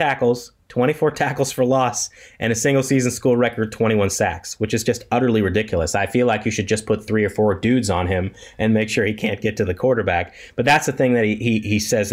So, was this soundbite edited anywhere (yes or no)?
no